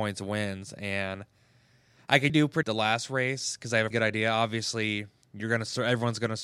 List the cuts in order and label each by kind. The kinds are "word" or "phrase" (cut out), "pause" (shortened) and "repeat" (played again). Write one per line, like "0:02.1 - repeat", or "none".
0:02.3 - word
0:02.6 - word
0:03.9 - word